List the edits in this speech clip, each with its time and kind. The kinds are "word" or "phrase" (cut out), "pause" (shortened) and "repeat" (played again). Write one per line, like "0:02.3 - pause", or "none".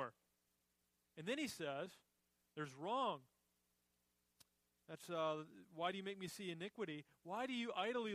none